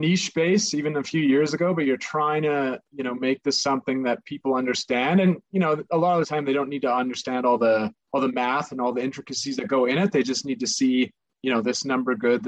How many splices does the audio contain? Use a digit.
0